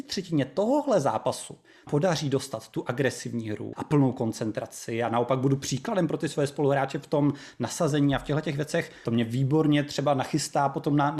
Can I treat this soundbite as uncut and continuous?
no; 3 cuts; at 1.9 s, 3.7 s, 9.0 s

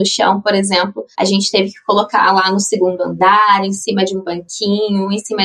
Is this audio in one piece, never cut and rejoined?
no; 1 cut; at 1.1 s

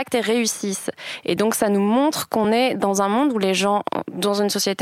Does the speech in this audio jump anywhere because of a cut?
no; 0 cuts

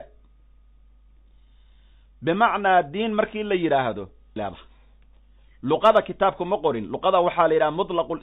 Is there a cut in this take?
yes; 1 cut; at 4.4 s

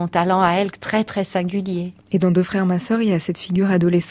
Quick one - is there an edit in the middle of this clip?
yes; 1 cut; at 2.0 s

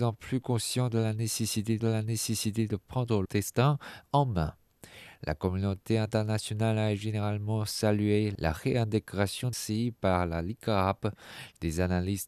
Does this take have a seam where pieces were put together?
yes; 3 cuts; at 1.8 s, 3.2 s, 9.5 s

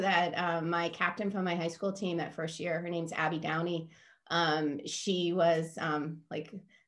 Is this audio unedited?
yes; 0 cuts

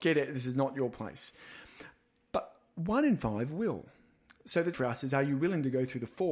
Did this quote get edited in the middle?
yes; 1 cut; at 4.7 s

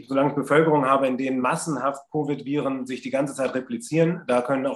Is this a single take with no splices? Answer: yes; 0 cuts

